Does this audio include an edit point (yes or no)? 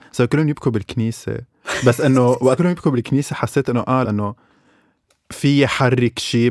yes